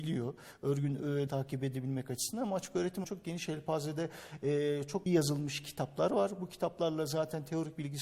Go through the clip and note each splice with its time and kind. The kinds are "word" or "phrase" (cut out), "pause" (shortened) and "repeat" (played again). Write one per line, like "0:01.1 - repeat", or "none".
0:01.3 - word
0:03.0 - word
0:05.1 - word